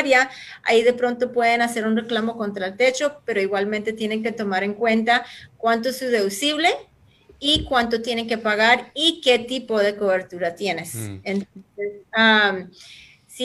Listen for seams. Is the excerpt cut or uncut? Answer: uncut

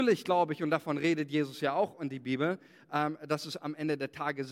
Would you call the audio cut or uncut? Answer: uncut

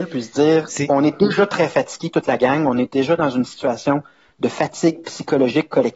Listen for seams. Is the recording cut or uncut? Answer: uncut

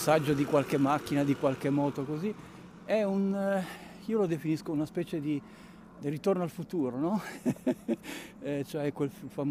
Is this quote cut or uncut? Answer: cut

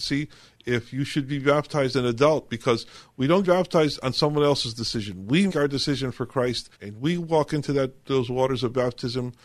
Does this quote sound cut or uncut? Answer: cut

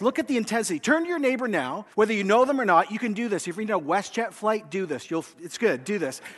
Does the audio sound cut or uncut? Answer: cut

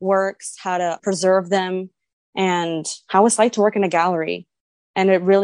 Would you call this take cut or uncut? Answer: cut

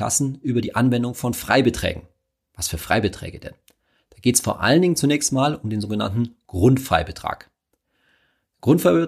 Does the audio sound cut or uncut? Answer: uncut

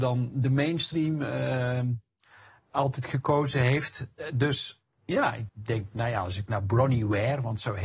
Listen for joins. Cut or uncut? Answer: cut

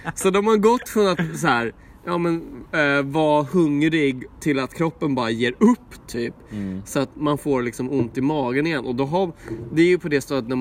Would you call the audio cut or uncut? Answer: uncut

